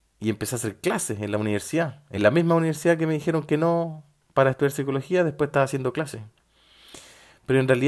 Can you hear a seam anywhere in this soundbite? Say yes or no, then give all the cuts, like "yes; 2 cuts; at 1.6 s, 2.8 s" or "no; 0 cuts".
no; 0 cuts